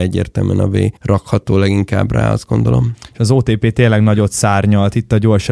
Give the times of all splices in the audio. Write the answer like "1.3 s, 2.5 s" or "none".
1.0 s